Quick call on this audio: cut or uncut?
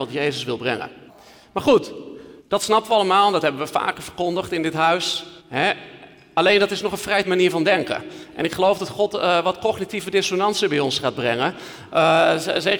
cut